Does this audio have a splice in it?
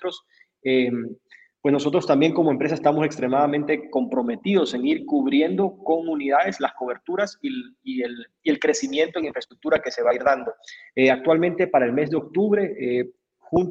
no; 0 cuts

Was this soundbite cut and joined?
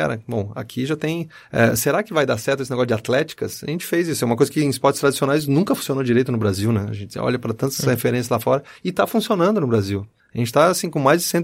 no; 0 cuts

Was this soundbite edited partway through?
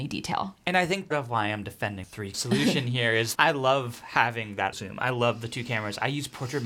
yes; 5 cuts; at 1.1 s, 2.0 s, 2.3 s, 3.3 s, 4.7 s

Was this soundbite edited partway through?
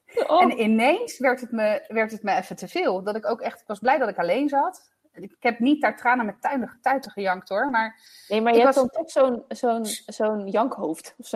no; 0 cuts

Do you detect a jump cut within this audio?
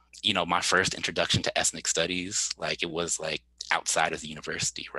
no; 0 cuts

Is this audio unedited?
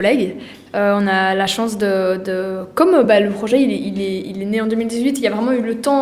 yes; 0 cuts

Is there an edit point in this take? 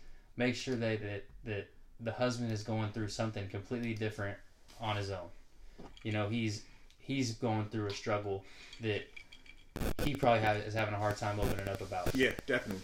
no; 0 cuts

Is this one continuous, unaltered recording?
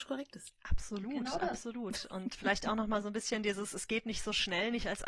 yes; 0 cuts

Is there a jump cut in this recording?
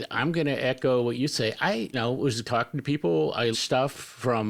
yes; 3 cuts; at 1.9 s, 2.4 s, 3.5 s

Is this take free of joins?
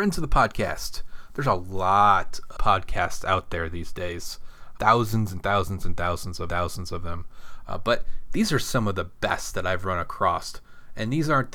no; 3 cuts; at 2.6 s, 4.8 s, 6.5 s

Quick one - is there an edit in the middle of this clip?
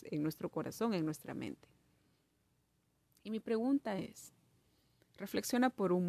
no; 0 cuts

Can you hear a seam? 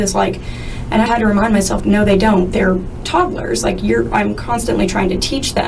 yes; 3 cuts; at 1.1 s, 1.8 s, 3.0 s

